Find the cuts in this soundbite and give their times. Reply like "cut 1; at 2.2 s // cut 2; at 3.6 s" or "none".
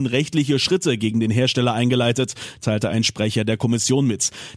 none